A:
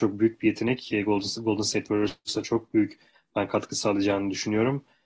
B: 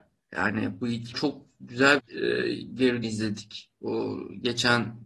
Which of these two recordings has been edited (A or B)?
B